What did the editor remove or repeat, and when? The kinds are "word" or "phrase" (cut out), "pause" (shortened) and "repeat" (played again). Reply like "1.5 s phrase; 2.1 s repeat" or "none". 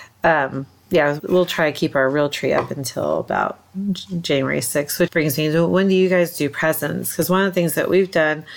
1.2 s word; 5.1 s word